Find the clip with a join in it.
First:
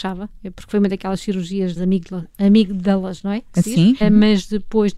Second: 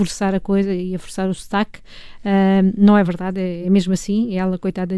first; 3 cuts; at 1.8 s, 2.3 s, 4.0 s

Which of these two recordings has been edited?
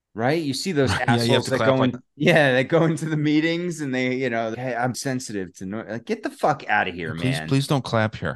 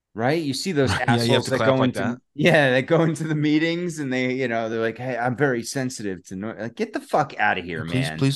first; 3 cuts; at 1.9 s, 4.5 s, 4.9 s

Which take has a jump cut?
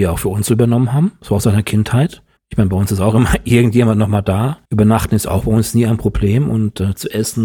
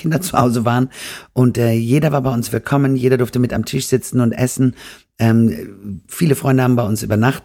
first; 2 cuts; at 2.4 s, 4.6 s

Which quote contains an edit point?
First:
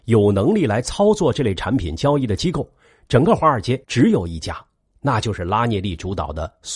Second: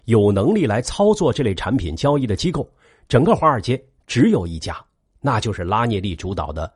first; 1 cut; at 3.8 s

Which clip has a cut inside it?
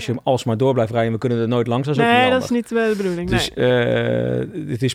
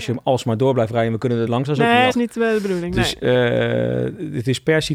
second; 2 cuts; at 1.5 s, 2.1 s

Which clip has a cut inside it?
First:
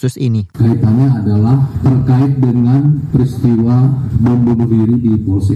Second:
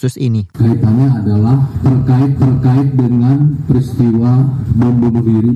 second; 1 cut; at 2.4 s

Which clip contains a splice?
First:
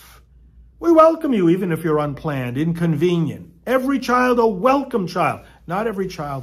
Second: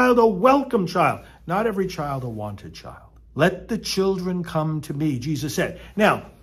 second; 1 cut; at 3.3 s

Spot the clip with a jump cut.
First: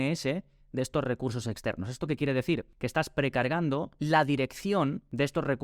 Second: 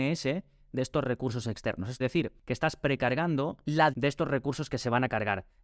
second; 2 cuts; at 2.0 s, 3.9 s

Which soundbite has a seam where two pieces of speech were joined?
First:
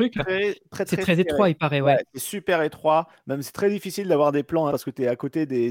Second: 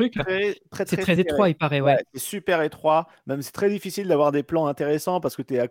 first; 1 cut; at 4.7 s

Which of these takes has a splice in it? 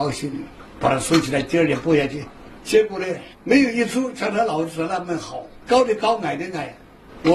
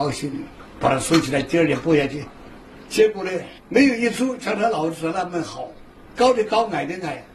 first; 2 cuts; at 2.6 s, 5.6 s

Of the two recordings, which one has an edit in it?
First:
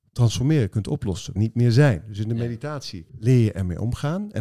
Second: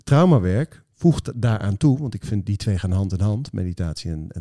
first; 2 cuts; at 1.4 s, 3.1 s

